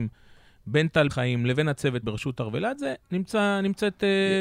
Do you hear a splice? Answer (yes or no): yes